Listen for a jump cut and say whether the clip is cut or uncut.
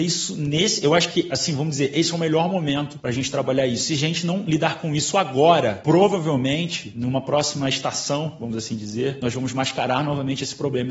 uncut